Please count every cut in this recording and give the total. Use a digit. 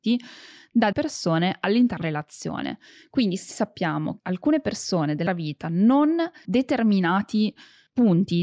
6